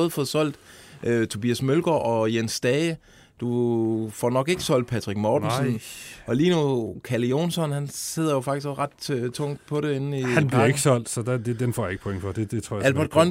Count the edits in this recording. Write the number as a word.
zero